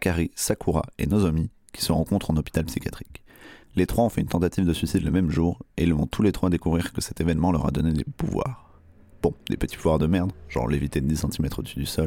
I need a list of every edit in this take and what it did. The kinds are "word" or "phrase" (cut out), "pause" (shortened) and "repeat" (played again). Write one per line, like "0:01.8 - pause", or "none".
0:03.6 - pause
0:09.4 - pause